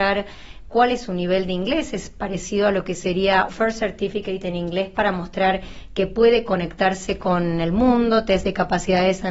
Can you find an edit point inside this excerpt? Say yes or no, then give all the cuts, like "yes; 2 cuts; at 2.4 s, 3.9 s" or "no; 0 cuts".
yes; 1 cut; at 3.5 s